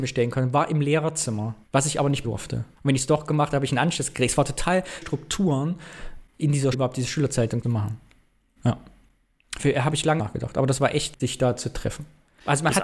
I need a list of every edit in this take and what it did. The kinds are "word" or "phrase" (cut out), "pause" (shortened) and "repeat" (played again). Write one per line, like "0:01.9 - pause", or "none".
0:01.6 - pause
0:02.2 - word
0:02.7 - pause
0:05.0 - word
0:06.3 - word
0:06.7 - word
0:07.6 - word
0:10.2 - phrase
0:11.2 - word

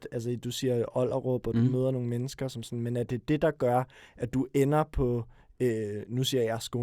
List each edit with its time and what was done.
none

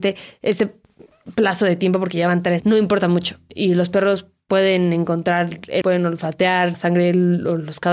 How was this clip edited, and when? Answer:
0:02.6 - word
0:05.8 - word
0:06.7 - word

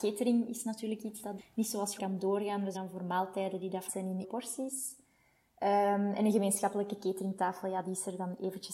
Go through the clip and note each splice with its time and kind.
0:01.4 - word
0:02.0 - word
0:02.7 - word
0:03.9 - word
0:04.2 - word

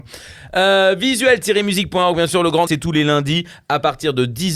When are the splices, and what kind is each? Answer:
0:02.7 - word

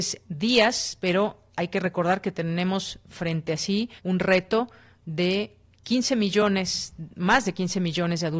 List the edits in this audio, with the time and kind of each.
0:04.0 - pause

